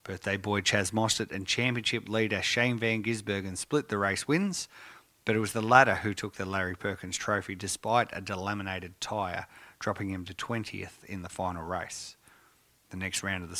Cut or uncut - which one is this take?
uncut